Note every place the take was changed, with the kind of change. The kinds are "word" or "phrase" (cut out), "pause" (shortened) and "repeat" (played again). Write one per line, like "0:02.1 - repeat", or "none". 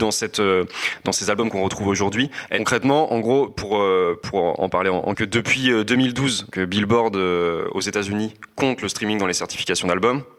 0:05.1 - phrase
0:06.5 - word